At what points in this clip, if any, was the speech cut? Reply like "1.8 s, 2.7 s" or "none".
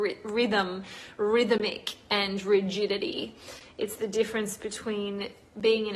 none